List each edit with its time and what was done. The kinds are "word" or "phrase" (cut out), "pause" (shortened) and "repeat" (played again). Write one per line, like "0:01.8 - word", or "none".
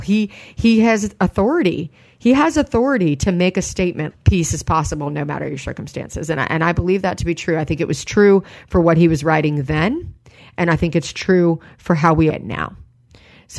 0:04.1 - word
0:12.3 - word